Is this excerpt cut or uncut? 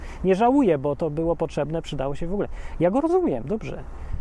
uncut